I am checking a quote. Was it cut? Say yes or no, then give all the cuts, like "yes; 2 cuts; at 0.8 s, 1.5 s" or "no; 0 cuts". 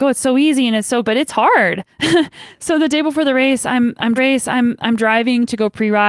yes; 3 cuts; at 1.0 s, 1.9 s, 4.2 s